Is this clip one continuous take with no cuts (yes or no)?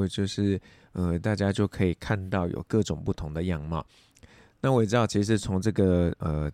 yes